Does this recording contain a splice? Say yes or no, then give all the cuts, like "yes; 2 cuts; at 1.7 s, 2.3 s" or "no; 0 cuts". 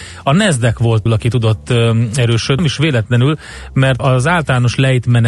yes; 3 cuts; at 1.1 s, 2.6 s, 4.0 s